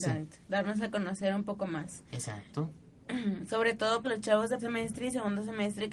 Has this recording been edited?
yes; 2 cuts; at 4.0 s, 4.6 s

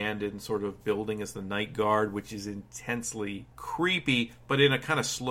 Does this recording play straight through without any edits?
no; 1 cut; at 3.5 s

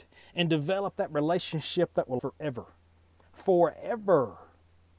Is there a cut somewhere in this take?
yes; 1 cut; at 2.2 s

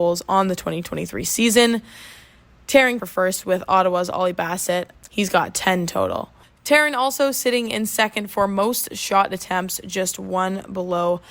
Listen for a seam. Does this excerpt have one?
yes; 1 cut; at 3.0 s

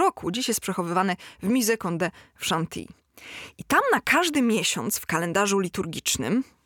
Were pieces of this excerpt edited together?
no; 0 cuts

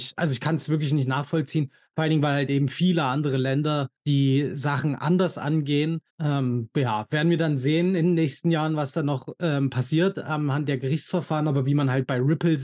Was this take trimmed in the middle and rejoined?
yes; 2 cuts; at 4.0 s, 6.1 s

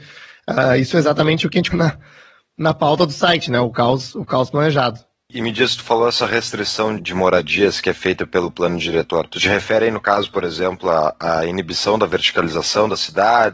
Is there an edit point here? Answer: yes; 2 cuts; at 1.7 s, 7.0 s

